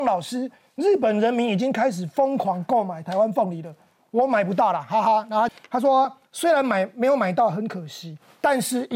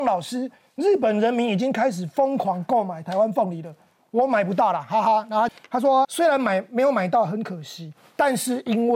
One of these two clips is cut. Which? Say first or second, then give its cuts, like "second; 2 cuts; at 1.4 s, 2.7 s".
second; 1 cut; at 6.0 s